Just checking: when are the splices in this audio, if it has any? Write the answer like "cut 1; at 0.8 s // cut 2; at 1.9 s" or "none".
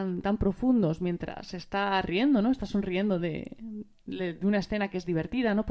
none

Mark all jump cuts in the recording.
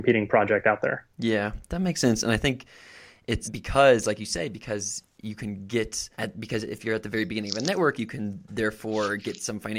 cut 1; at 1.1 s // cut 2; at 3.4 s // cut 3; at 6.1 s

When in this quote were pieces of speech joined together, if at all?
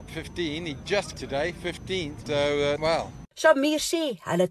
cut 1; at 1.1 s // cut 2; at 2.8 s

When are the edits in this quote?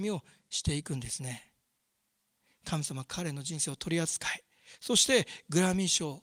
none

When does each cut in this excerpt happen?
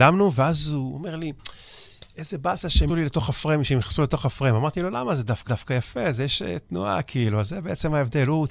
cut 1; at 2.9 s // cut 2; at 5.5 s

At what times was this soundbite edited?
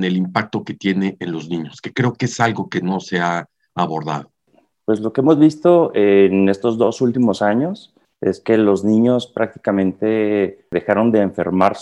none

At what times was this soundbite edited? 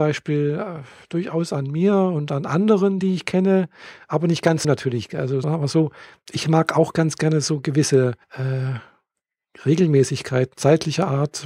cut 1; at 4.6 s // cut 2; at 5.4 s // cut 3; at 8.2 s // cut 4; at 10.5 s

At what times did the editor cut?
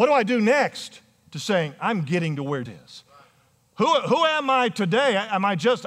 cut 1; at 2.7 s

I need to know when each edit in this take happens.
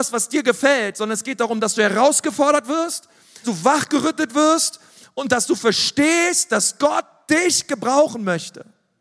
cut 1; at 3.4 s

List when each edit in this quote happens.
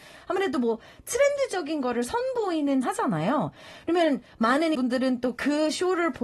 cut 1; at 2.8 s // cut 2; at 4.7 s

